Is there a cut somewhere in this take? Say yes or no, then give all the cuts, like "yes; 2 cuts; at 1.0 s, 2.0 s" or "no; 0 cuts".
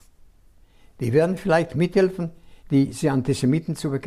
yes; 1 cut; at 2.6 s